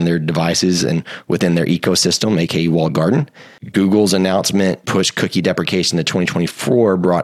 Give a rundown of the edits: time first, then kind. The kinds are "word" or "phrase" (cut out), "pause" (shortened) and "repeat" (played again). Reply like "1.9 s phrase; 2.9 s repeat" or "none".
4.8 s word